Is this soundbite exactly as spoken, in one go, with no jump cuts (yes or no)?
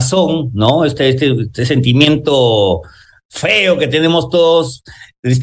yes